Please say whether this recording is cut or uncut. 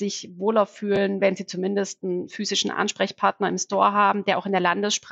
uncut